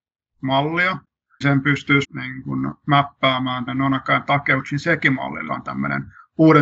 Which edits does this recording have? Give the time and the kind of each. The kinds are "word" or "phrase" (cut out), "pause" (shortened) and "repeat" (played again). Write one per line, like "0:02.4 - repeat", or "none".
0:01.4 - word
0:02.0 - word
0:03.7 - word
0:05.5 - word